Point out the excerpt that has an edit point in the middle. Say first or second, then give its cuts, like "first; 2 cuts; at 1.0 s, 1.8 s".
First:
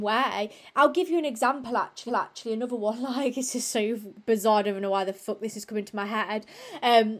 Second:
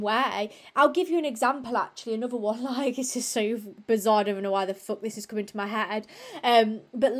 first; 1 cut; at 2.1 s